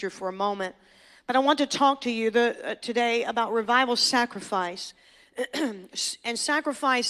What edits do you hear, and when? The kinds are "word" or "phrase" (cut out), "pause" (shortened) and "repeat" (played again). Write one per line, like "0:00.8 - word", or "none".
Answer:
none